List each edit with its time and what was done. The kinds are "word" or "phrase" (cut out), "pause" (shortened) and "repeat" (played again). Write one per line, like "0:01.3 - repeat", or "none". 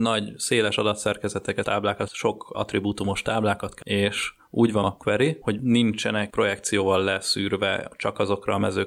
0:01.6 - word
0:02.1 - word
0:02.5 - word
0:03.8 - word
0:04.8 - word
0:05.4 - word
0:06.3 - word